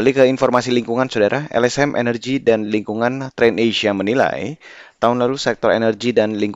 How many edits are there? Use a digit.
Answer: 0